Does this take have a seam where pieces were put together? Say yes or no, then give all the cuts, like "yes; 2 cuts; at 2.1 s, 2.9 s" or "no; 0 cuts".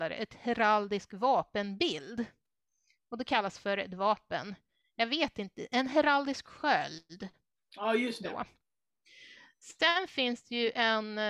no; 0 cuts